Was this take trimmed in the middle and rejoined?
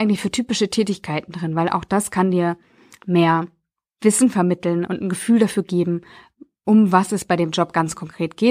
yes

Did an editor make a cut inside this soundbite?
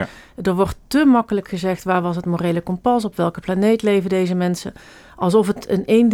no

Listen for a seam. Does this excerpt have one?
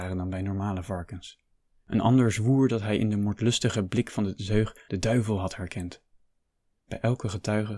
no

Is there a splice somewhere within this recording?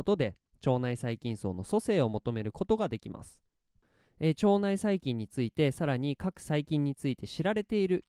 no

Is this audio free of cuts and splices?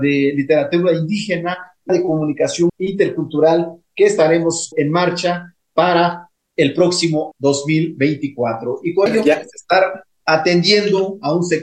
no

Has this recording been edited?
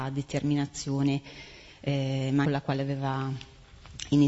yes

